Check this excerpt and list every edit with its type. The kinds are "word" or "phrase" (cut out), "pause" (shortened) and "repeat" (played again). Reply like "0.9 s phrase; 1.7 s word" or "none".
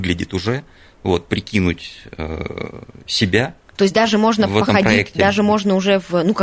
none